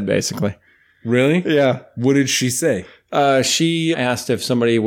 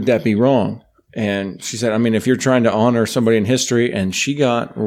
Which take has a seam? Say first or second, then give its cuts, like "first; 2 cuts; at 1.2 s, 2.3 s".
first; 1 cut; at 3.9 s